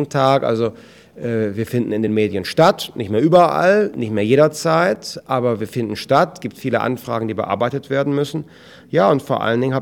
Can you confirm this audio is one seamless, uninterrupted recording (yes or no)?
yes